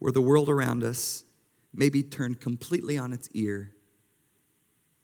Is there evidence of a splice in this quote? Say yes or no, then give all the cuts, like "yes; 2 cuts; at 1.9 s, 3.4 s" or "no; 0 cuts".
no; 0 cuts